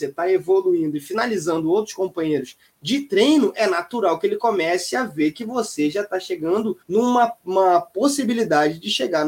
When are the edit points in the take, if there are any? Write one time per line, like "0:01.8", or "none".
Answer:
0:06.8